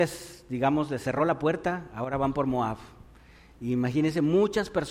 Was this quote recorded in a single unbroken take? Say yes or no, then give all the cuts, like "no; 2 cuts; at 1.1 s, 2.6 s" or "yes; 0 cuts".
yes; 0 cuts